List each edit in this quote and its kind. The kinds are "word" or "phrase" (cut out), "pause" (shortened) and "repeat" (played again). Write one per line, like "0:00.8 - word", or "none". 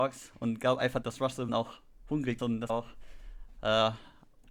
0:01.0 - word
0:01.5 - word
0:02.4 - word
0:02.7 - word